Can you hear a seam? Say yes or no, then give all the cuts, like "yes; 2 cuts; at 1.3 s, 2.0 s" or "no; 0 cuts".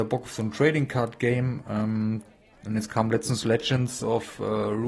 no; 0 cuts